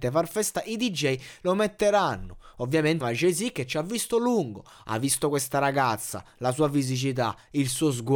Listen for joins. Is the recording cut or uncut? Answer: cut